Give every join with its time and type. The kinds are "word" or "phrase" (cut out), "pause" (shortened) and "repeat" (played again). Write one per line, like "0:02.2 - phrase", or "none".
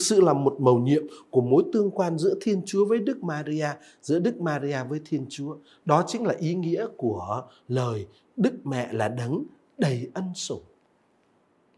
none